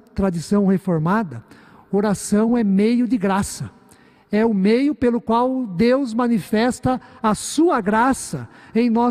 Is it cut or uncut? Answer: uncut